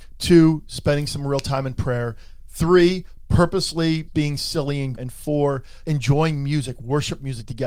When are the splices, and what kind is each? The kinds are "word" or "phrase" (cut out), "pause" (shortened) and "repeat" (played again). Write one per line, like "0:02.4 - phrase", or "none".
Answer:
0:04.1 - word
0:04.9 - word
0:05.8 - word